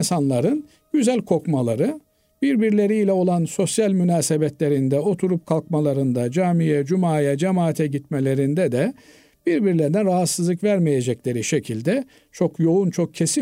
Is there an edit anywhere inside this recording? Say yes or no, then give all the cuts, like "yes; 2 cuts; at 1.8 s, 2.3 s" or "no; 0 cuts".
no; 0 cuts